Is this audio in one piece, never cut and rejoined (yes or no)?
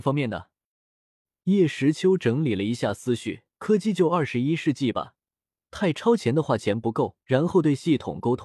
no